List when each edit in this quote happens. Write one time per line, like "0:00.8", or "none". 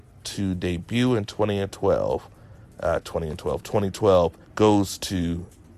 0:02.6
0:04.4